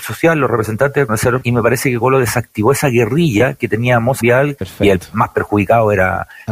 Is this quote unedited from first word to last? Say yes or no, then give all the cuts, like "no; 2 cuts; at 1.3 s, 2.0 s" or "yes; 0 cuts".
no; 5 cuts; at 1.1 s, 1.4 s, 2.0 s, 4.2 s, 4.6 s